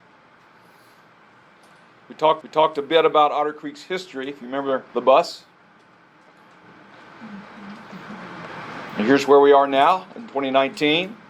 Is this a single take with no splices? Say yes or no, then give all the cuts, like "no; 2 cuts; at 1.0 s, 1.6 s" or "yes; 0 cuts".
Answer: no; 2 cuts; at 2.4 s, 4.9 s